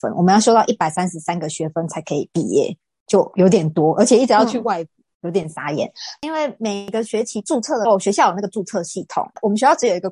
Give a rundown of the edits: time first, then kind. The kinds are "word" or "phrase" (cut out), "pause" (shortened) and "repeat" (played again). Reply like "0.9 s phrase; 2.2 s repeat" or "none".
none